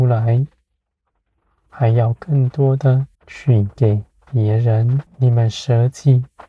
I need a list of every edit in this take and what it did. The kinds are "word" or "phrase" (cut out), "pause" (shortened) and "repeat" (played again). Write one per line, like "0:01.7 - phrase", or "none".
0:03.1 - pause
0:05.1 - pause